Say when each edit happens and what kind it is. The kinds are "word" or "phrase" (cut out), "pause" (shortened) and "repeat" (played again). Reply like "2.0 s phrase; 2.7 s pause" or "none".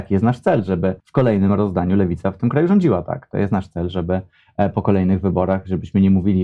1.0 s pause